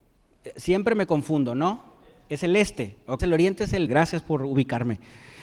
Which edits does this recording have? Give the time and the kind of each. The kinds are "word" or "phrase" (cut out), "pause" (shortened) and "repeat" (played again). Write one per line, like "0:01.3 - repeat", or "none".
0:03.2 - word
0:03.9 - word